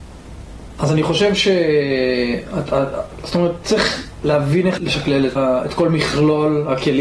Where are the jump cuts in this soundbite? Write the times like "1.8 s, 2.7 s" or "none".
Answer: 4.8 s, 5.4 s